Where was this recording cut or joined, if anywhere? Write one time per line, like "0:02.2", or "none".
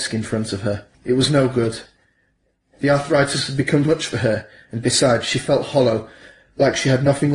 0:00.9
0:03.9